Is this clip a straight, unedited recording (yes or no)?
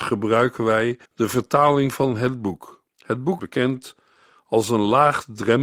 no